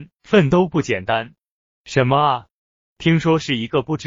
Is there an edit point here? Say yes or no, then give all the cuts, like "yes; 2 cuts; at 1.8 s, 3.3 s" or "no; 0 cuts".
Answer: no; 0 cuts